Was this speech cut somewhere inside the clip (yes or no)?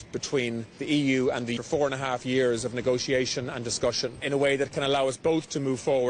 yes